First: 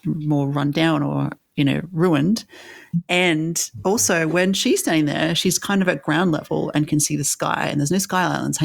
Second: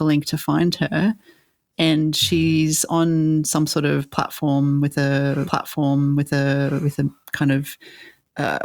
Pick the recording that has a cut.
second; 2 cuts; at 5.4 s, 7.2 s

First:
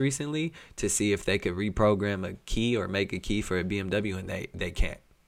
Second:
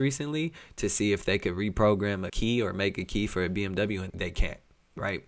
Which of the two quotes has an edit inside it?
second; 2 cuts; at 2.3 s, 4.1 s

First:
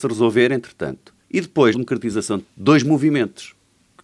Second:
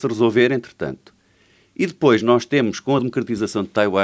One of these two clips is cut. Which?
first; 3 cuts; at 1.2 s, 1.7 s, 2.4 s

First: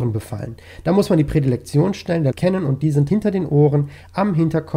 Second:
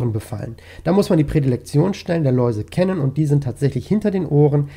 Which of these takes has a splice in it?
first; 2 cuts; at 2.3 s, 3.1 s

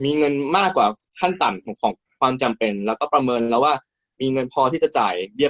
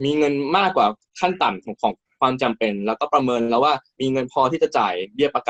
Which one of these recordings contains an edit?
second; 1 cut; at 3.9 s

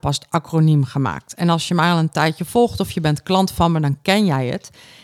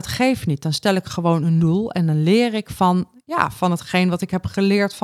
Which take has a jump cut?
second; 1 cut; at 1.6 s

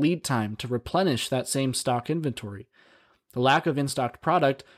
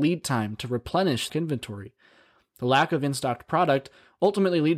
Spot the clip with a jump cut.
second; 1 cut; at 1.3 s

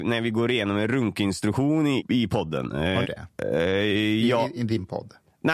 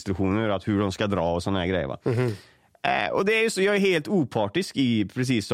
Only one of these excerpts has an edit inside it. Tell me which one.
first; 3 cuts; at 2.0 s, 3.0 s, 4.6 s

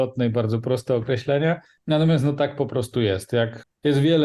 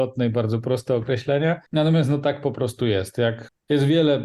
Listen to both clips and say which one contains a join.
second; 1 cut; at 1.7 s

